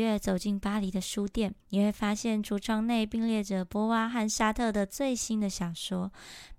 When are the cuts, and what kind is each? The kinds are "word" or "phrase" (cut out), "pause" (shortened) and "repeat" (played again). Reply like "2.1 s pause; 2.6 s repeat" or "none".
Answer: 1.6 s pause